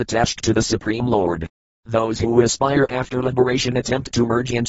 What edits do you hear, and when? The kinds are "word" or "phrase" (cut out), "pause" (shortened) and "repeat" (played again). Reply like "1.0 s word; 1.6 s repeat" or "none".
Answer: none